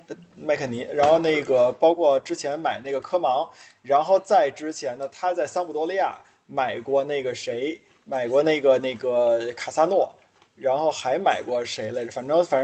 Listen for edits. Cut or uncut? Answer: uncut